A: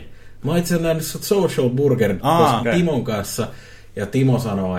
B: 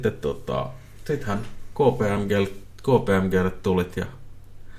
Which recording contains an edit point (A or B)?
A